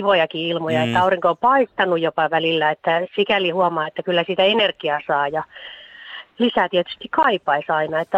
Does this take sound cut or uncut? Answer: uncut